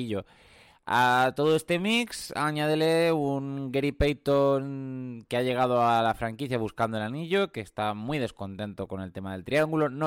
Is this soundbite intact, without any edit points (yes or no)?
yes